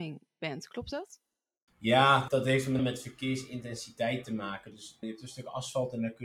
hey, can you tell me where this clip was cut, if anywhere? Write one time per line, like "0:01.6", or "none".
0:02.3
0:02.8
0:05.0

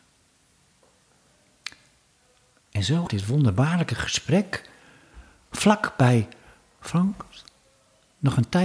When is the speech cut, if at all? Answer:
0:03.1

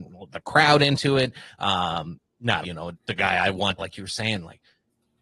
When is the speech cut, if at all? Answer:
0:02.6
0:02.9
0:03.8

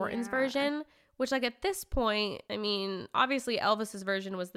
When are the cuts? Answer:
0:02.4

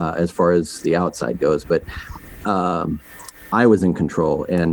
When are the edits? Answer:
0:02.4

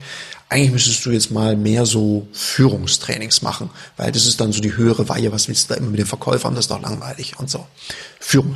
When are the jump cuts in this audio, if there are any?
none

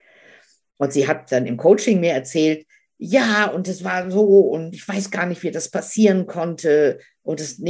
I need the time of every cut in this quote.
none

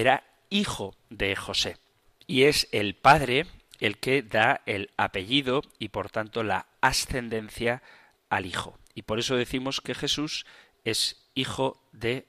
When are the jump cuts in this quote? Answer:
none

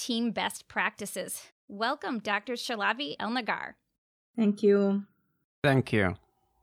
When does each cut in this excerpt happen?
0:01.5
0:03.2

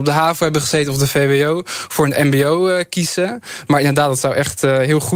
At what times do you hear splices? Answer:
none

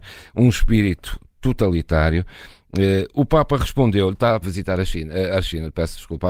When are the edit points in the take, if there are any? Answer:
0:04.4

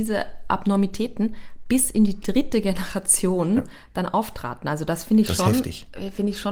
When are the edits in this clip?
none

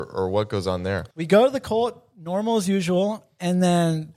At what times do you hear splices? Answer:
0:01.1

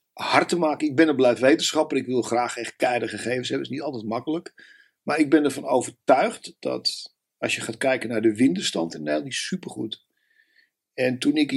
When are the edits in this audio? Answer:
none

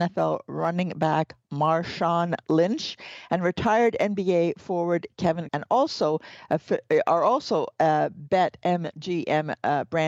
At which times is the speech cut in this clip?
0:05.5

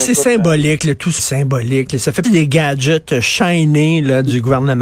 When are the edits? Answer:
0:01.2
0:02.2

